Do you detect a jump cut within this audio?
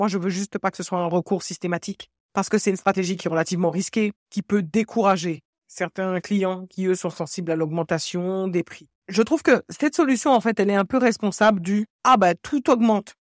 yes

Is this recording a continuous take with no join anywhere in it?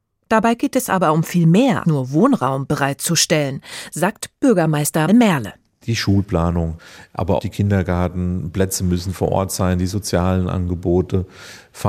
no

